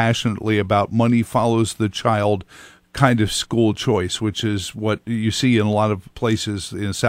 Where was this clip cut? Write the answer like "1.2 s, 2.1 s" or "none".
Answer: 6.1 s